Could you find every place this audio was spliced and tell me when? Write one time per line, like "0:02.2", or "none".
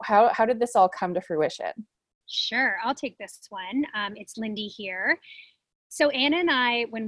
none